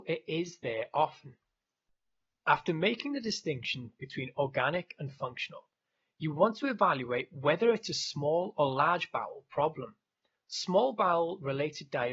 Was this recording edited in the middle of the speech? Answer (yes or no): no